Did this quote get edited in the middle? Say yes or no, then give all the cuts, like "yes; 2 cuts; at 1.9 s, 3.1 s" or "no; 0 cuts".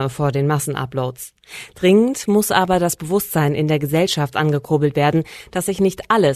no; 0 cuts